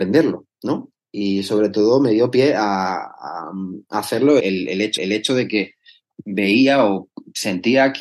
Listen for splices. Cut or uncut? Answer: cut